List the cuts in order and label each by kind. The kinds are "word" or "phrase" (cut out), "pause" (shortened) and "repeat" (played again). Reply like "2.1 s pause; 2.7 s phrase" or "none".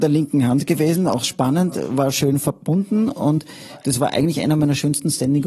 none